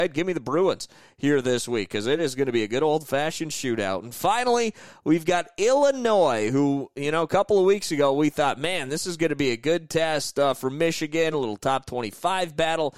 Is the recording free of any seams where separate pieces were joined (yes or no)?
yes